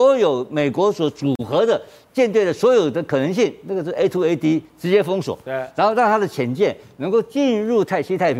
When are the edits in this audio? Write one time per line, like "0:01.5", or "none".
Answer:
none